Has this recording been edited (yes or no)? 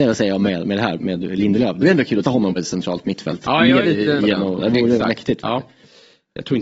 yes